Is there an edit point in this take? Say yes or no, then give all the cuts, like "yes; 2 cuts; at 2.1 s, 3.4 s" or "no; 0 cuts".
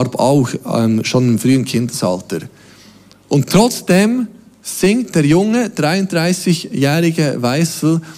no; 0 cuts